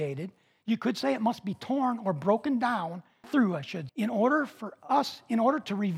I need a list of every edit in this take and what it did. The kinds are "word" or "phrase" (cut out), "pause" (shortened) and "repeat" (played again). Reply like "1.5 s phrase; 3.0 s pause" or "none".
3.2 s word; 3.9 s word